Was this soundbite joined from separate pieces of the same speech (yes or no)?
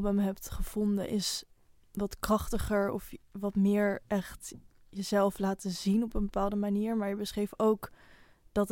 no